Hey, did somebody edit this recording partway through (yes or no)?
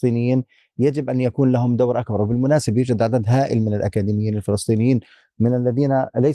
no